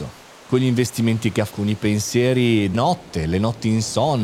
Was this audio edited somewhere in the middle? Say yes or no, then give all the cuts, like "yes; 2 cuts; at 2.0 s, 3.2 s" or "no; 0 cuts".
yes; 2 cuts; at 1.5 s, 2.7 s